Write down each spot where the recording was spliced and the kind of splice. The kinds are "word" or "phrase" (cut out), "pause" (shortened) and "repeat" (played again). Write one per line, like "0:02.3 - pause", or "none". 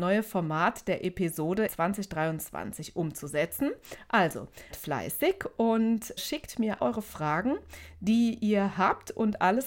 0:01.7 - word
0:04.7 - word
0:06.2 - word
0:06.8 - word